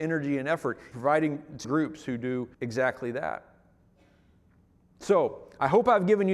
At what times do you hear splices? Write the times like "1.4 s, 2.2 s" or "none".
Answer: 0.9 s, 1.6 s, 2.5 s